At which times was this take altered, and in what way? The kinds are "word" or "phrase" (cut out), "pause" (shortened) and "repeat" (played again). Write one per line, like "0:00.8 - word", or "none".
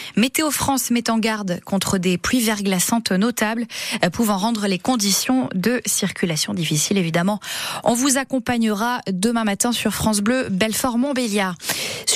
none